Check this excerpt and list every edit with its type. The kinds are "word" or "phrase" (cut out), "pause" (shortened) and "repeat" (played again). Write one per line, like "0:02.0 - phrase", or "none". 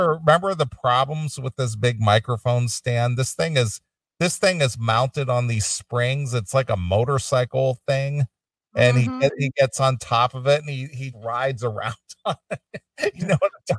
0:11.1 - word